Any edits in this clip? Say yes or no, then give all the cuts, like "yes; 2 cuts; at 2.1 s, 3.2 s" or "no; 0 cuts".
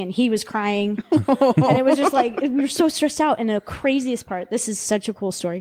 no; 0 cuts